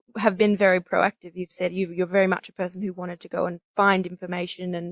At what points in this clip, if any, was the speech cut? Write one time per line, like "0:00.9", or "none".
none